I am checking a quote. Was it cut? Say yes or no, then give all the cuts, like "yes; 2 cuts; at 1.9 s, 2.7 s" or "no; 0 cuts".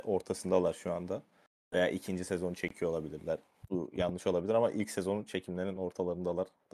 no; 0 cuts